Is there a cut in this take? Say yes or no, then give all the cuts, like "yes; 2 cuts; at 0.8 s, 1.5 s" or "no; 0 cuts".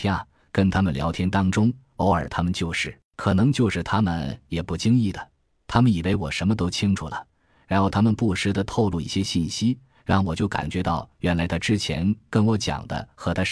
yes; 1 cut; at 3.1 s